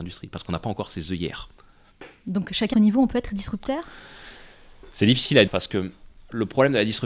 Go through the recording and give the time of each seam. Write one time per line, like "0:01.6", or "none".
0:02.7
0:05.5